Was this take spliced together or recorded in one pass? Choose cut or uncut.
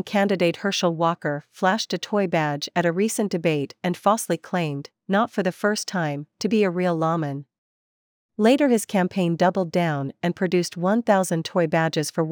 uncut